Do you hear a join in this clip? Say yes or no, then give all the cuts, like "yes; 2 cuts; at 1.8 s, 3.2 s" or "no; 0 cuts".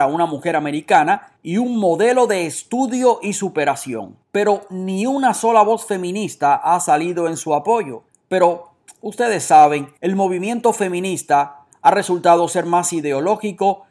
yes; 4 cuts; at 1.4 s, 4.2 s, 8.1 s, 10.0 s